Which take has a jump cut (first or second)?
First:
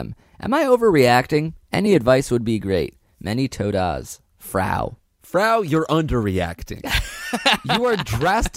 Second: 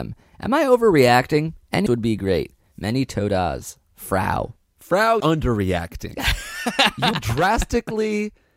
second